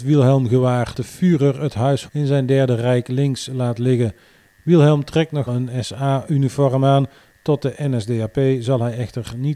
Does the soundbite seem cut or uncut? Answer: cut